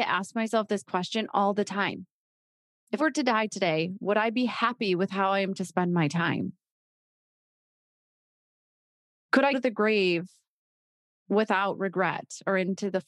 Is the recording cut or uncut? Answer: cut